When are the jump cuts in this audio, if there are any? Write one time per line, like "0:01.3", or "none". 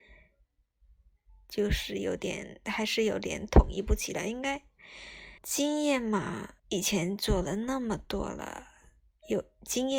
0:05.4
0:06.6